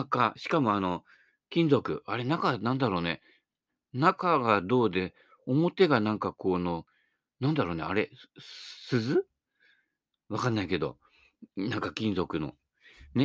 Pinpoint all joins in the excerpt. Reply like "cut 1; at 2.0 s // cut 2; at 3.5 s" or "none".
none